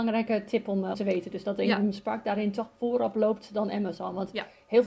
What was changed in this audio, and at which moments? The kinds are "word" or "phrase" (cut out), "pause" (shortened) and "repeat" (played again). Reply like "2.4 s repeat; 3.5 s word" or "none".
0.9 s word

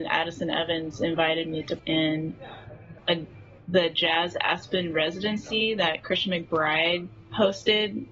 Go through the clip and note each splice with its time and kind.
1.8 s word; 3.0 s word

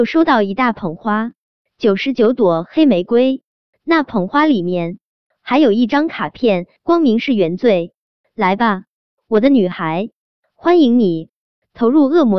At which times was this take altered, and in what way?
none

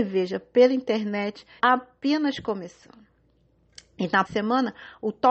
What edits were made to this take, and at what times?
1.6 s word; 4.3 s word

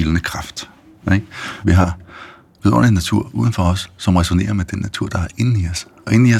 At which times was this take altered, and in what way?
none

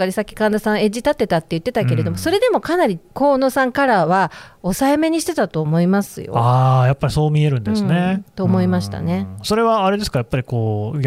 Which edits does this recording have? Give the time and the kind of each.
3.1 s pause

